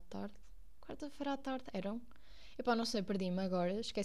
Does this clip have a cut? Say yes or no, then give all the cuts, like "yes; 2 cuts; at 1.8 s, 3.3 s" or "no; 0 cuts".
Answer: no; 0 cuts